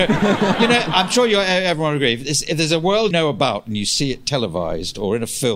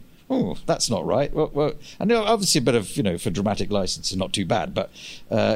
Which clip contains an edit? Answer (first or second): first